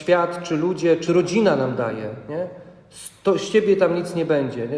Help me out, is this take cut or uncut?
cut